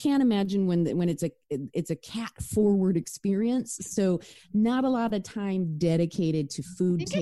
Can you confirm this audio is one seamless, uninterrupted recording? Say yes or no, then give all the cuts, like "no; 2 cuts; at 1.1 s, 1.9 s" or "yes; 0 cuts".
yes; 0 cuts